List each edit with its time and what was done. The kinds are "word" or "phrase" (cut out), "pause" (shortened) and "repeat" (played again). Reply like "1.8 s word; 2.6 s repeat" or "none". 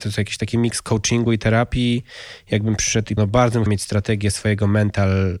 3.2 s word; 3.7 s word